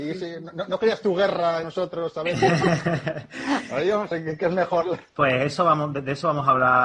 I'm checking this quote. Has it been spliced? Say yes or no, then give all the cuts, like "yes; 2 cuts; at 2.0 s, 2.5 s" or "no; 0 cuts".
yes; 3 cuts; at 1.6 s, 4.1 s, 5.1 s